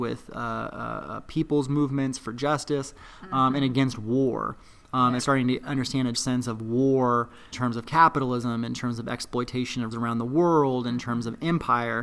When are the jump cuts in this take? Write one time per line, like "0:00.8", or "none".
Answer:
0:05.2
0:06.1
0:07.5
0:09.9